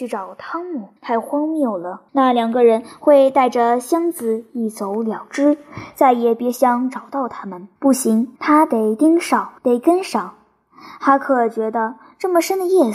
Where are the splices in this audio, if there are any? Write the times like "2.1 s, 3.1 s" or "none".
1.0 s, 2.1 s, 7.8 s, 8.4 s, 9.6 s